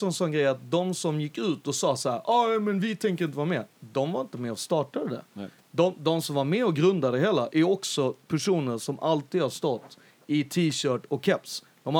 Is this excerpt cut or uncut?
uncut